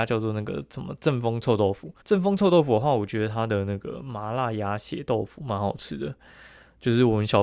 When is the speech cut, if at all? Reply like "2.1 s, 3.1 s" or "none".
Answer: 2.0 s